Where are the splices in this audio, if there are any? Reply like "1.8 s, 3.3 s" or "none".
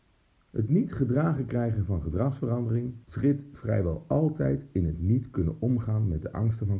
3.0 s